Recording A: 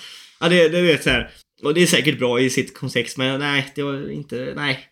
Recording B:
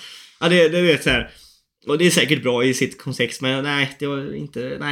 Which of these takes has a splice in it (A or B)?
A